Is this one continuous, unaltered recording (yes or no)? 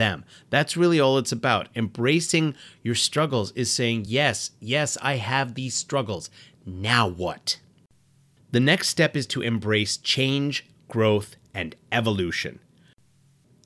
yes